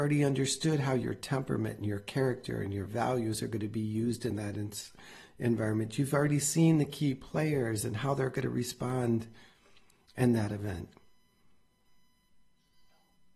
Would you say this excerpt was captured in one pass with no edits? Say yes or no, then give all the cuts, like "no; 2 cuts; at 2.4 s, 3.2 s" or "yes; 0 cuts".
yes; 0 cuts